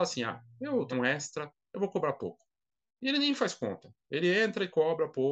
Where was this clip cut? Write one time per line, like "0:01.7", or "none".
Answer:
0:00.9